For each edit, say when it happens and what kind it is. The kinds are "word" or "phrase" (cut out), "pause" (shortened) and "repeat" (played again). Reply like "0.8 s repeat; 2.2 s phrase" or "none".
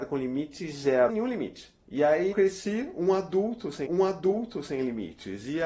1.1 s phrase; 1.8 s pause; 2.3 s word; 3.9 s repeat